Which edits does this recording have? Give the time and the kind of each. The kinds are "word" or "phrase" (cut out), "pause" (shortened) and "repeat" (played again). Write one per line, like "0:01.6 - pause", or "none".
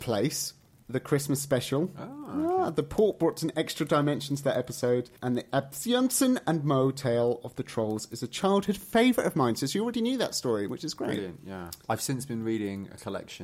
0:05.2 - pause